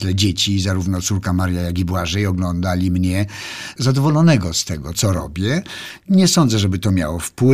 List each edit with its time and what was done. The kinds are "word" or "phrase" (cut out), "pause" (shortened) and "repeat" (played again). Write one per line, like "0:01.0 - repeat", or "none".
0:04.9 - word